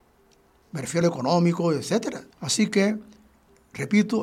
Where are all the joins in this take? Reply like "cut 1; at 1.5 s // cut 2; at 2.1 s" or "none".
cut 1; at 1.0 s // cut 2; at 2.3 s